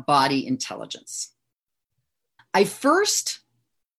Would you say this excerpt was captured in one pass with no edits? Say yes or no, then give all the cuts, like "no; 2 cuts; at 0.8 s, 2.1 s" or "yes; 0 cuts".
yes; 0 cuts